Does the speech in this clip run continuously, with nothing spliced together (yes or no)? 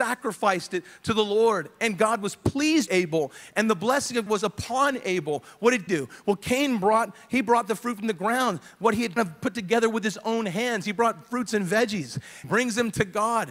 no